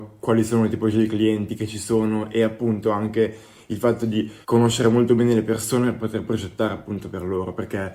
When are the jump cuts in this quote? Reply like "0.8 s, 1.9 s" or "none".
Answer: 4.4 s

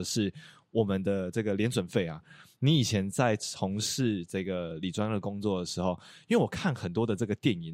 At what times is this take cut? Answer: none

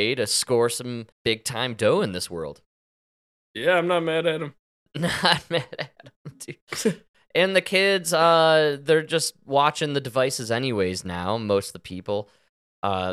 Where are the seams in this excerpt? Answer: 1.1 s, 3.1 s, 6.6 s

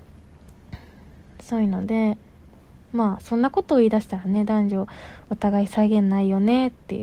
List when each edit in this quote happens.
none

